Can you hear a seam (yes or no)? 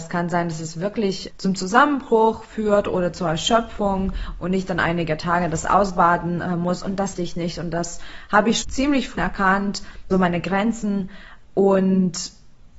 yes